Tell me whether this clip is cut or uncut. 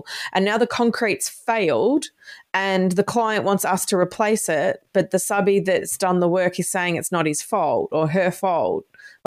uncut